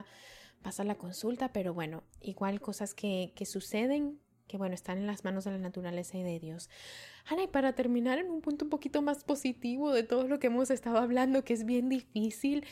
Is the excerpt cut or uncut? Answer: uncut